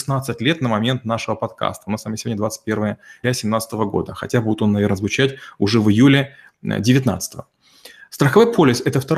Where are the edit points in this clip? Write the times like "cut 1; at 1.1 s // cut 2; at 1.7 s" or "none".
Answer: cut 1; at 3.2 s